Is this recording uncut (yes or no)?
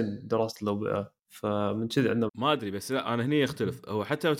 no